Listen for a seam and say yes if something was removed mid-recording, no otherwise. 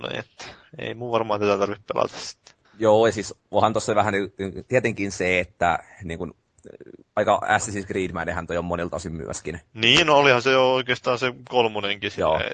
no